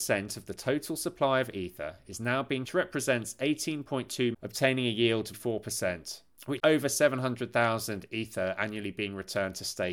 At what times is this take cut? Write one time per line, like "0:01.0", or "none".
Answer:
0:02.6
0:04.3
0:05.3
0:06.6